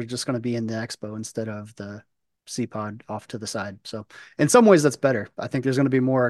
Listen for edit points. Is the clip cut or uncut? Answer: uncut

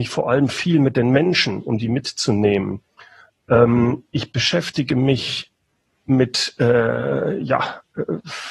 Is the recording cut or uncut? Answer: uncut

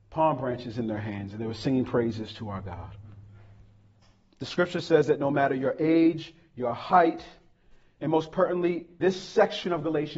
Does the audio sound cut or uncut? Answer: cut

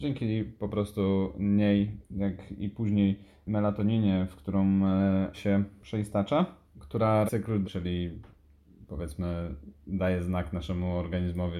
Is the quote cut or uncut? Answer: cut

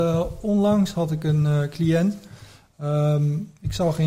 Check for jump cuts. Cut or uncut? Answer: uncut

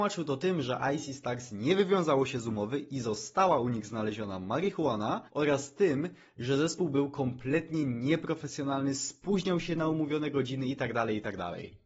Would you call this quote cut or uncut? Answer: cut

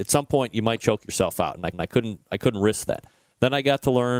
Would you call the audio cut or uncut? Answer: cut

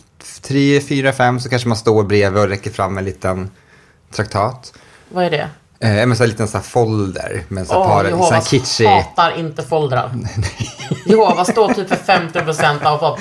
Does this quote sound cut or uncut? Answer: uncut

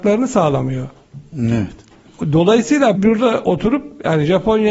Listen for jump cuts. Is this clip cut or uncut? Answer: cut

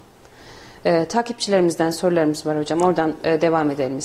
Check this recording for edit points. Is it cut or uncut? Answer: uncut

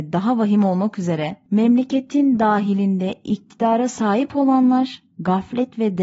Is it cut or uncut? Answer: uncut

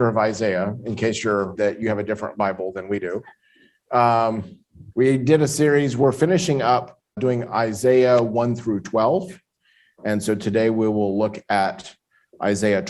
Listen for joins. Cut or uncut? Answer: cut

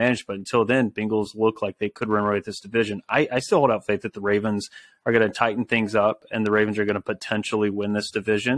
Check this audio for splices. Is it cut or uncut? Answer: uncut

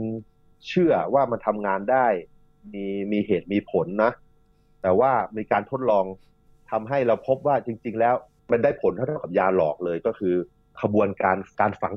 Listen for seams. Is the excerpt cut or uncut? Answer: uncut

